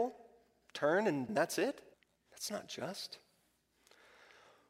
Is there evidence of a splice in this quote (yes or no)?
yes